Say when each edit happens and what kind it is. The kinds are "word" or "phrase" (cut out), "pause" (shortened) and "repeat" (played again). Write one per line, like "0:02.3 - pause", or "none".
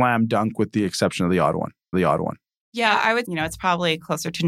0:01.9 - repeat
0:03.2 - word